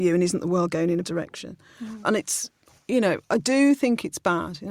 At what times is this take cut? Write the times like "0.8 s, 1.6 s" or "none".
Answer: 1.0 s